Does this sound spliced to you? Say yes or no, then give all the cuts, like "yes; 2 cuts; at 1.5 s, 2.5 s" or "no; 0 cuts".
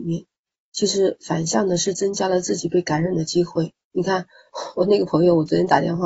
yes; 1 cut; at 3.8 s